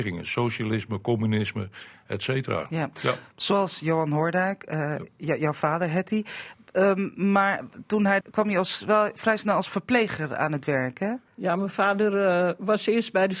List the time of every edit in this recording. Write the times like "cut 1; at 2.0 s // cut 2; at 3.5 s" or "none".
cut 1; at 8.2 s // cut 2; at 11.3 s